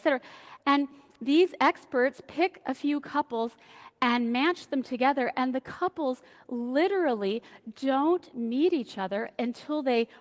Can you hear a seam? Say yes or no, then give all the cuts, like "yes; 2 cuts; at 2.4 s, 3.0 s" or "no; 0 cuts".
no; 0 cuts